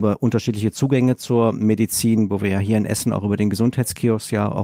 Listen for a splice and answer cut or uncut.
uncut